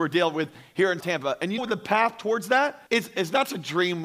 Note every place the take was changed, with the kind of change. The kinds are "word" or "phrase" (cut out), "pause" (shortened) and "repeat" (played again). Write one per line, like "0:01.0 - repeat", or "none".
0:01.0 - word
0:01.6 - word
0:02.9 - pause